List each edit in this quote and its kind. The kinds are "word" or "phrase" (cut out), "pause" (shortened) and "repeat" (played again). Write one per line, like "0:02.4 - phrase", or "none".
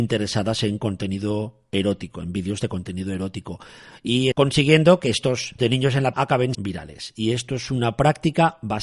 0:04.3 - word
0:05.6 - word
0:06.1 - word
0:06.5 - word